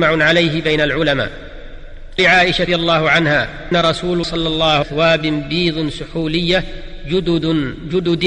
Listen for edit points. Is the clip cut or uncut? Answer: cut